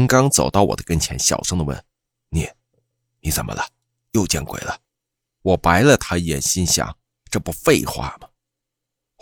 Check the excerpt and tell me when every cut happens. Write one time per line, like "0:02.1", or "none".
none